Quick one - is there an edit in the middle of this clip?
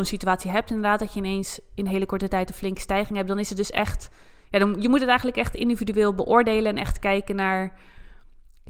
no; 0 cuts

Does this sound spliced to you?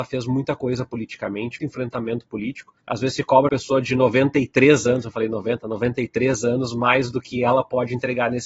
yes; 3 cuts; at 1.6 s, 2.8 s, 3.5 s

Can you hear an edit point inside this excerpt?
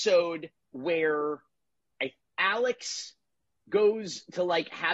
yes; 1 cut; at 2.2 s

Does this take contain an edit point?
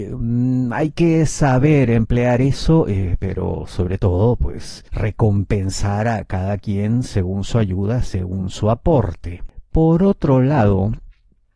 yes; 1 cut; at 4.9 s

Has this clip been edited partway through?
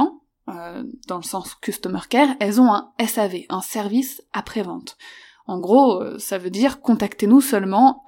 no; 0 cuts

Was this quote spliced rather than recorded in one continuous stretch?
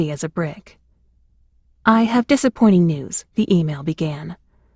yes; 1 cut; at 3.3 s

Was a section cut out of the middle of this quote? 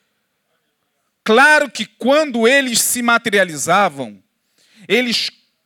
no; 0 cuts

